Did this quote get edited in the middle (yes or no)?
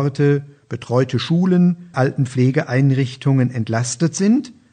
yes